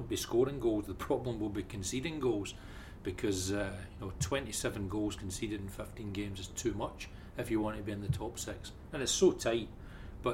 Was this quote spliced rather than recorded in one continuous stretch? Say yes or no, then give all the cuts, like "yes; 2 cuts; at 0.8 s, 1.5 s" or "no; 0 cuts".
no; 0 cuts